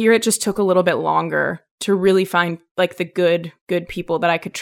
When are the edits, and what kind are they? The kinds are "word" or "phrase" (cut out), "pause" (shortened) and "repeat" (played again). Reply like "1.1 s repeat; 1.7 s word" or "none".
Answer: none

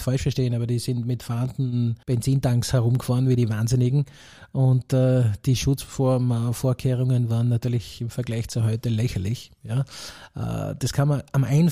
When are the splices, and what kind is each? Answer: 2.0 s pause

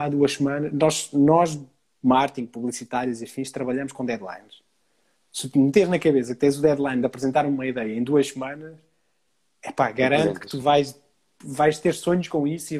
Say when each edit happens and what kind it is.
none

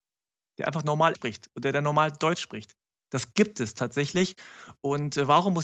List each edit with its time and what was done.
1.1 s word

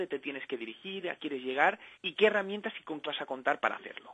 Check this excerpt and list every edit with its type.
1.2 s word; 1.9 s pause; 3.0 s word

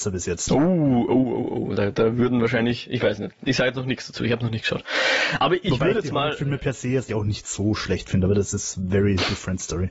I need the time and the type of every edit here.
7.1 s word

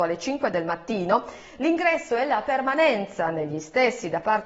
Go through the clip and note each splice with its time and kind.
none

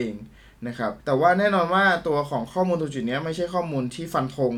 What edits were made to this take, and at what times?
1.0 s pause

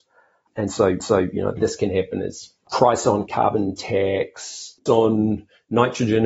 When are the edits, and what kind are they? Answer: 1.0 s repeat; 1.6 s word; 3.3 s word; 4.9 s word

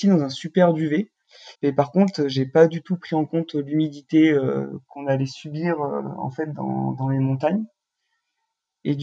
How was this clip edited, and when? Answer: 1.5 s pause

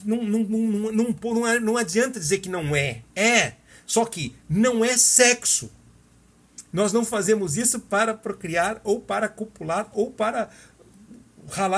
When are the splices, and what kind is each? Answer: 3.1 s pause

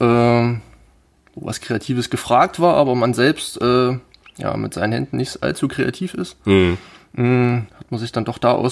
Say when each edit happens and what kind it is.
7.7 s pause

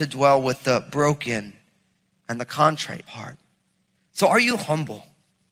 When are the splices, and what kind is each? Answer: 3.1 s word

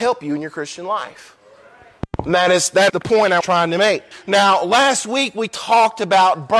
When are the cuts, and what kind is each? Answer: 2.9 s word; 3.4 s word; 4.1 s pause

